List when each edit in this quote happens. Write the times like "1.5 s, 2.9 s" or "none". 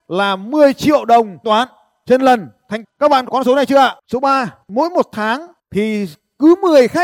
1.4 s, 2.8 s, 3.3 s, 4.0 s, 4.6 s, 5.6 s